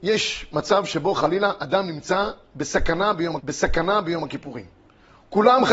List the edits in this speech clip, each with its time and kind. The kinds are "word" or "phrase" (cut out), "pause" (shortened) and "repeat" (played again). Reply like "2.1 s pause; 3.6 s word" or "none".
3.4 s repeat